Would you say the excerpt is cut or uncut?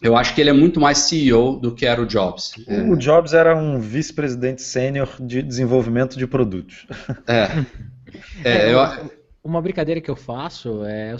uncut